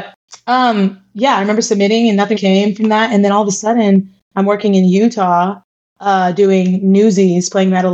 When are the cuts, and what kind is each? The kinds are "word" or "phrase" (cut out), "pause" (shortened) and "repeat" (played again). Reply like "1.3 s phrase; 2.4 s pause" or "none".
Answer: 2.4 s word